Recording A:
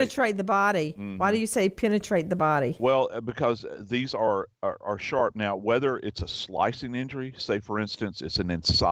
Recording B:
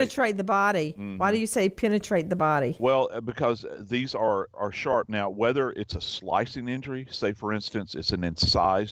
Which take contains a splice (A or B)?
B